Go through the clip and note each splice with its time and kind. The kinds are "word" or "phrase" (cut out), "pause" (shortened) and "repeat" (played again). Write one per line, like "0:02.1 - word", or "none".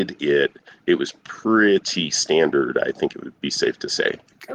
none